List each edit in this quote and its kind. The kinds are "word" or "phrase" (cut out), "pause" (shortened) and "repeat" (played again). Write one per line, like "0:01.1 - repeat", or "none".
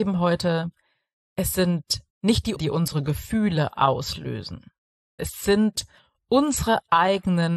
0:02.1 - pause
0:02.6 - word
0:05.2 - word